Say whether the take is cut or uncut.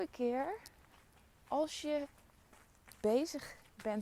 cut